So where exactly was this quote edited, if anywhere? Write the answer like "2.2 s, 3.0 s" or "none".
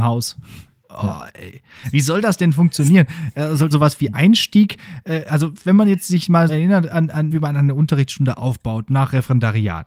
3.7 s, 6.5 s, 7.3 s